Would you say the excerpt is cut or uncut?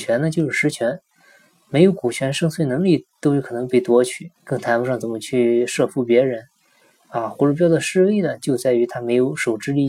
cut